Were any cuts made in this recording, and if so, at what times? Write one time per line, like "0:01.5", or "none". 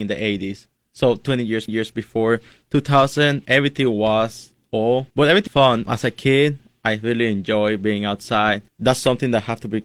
0:01.7
0:03.5
0:05.1
0:05.5
0:05.9
0:08.7